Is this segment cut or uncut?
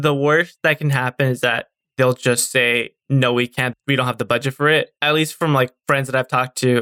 uncut